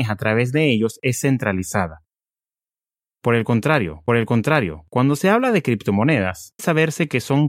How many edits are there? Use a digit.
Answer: 2